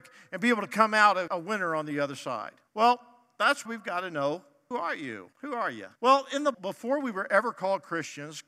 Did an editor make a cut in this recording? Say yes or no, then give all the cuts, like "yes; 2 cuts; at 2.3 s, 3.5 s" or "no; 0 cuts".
yes; 7 cuts; at 1.3 s, 2.7 s, 3.7 s, 4.7 s, 5.3 s, 6.0 s, 6.5 s